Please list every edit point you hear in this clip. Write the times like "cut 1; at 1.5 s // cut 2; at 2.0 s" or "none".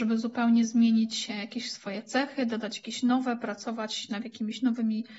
none